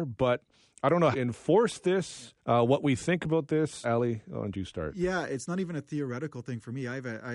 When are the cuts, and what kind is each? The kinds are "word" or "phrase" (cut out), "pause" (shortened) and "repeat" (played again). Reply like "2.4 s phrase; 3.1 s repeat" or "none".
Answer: 1.1 s phrase; 2.4 s pause; 3.8 s word

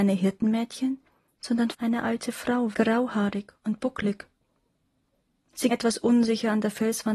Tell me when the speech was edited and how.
1.7 s word; 2.7 s word; 5.7 s word

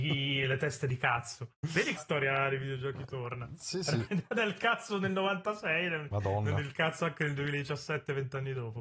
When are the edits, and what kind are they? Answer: 2.0 s word

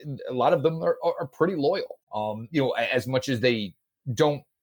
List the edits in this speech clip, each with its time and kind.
2.0 s pause

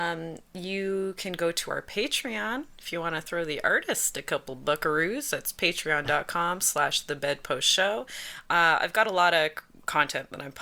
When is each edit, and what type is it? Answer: none

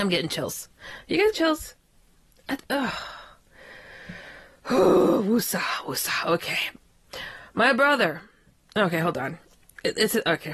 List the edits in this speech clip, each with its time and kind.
1.3 s word; 2.6 s word

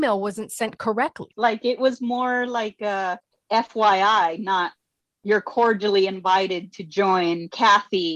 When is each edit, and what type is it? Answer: 1.8 s word

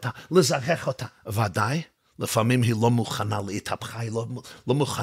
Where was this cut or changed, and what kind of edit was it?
2.0 s pause

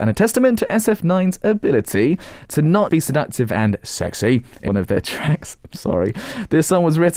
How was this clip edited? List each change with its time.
2.9 s word; 4.7 s phrase

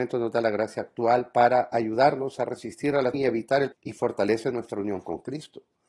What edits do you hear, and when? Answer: 3.1 s word; 3.7 s word

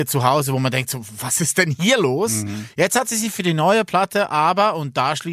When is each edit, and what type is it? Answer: none

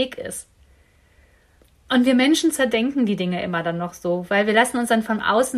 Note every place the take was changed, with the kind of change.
none

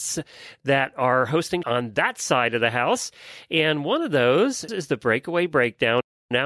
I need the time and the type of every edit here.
1.6 s word; 4.7 s word

